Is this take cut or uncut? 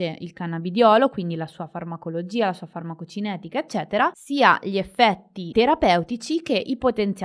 uncut